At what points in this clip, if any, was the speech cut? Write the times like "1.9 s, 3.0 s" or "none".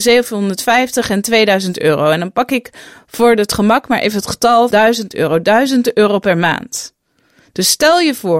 4.7 s